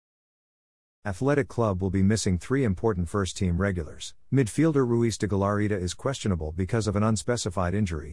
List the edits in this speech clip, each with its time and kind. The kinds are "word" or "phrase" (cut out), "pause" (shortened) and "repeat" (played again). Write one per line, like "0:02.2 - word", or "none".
none